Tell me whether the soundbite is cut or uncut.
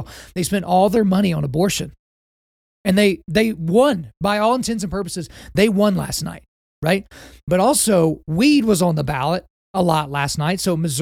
uncut